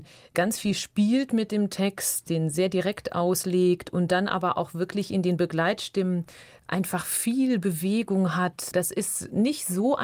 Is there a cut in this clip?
no; 0 cuts

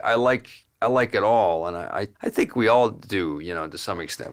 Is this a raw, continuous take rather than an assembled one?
no; 1 cut; at 2.1 s

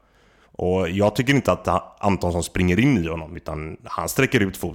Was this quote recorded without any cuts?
yes; 0 cuts

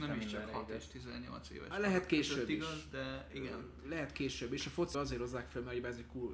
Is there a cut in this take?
yes; 1 cut; at 4.9 s

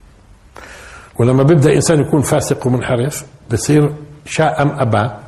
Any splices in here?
yes; 2 cuts; at 1.1 s, 4.2 s

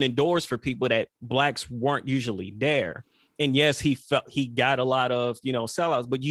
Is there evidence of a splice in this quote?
yes; 1 cut; at 1.2 s

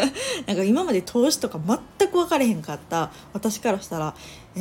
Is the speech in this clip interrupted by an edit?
no; 0 cuts

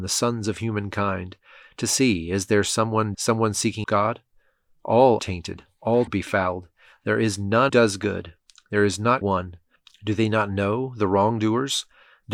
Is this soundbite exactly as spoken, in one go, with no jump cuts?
no; 6 cuts; at 3.1 s, 3.8 s, 5.2 s, 6.1 s, 7.7 s, 9.2 s

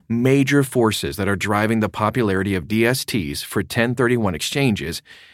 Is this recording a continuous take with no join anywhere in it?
yes; 0 cuts

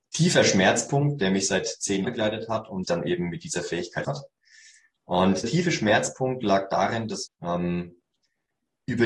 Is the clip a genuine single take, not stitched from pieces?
no; 5 cuts; at 2.0 s, 2.8 s, 4.0 s, 5.4 s, 7.3 s

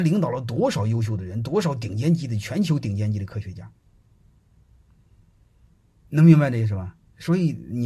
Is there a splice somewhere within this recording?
no; 0 cuts

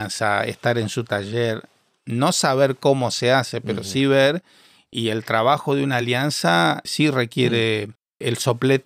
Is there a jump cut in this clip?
no; 0 cuts

